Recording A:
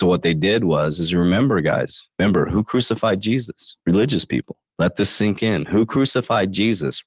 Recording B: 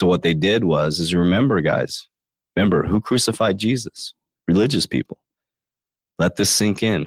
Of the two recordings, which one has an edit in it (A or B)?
A